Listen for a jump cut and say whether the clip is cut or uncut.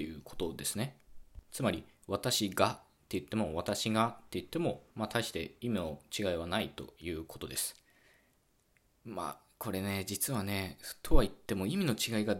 cut